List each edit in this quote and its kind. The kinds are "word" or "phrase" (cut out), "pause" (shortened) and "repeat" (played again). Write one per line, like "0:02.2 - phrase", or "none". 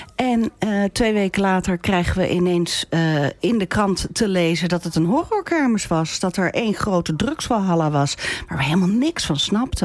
none